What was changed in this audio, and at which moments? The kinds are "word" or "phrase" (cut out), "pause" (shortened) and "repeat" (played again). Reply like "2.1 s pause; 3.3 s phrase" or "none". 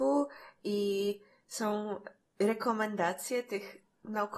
none